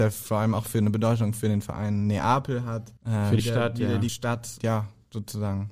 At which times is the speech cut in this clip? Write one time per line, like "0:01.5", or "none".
0:03.0
0:03.4
0:04.1
0:04.6